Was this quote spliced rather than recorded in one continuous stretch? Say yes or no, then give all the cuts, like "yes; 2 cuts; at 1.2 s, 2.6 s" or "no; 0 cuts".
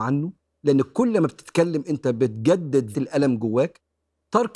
yes; 1 cut; at 2.9 s